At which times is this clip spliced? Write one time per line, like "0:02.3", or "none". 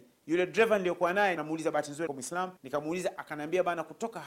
0:01.4
0:02.1
0:02.6